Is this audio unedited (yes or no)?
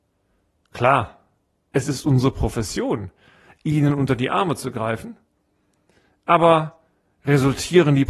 yes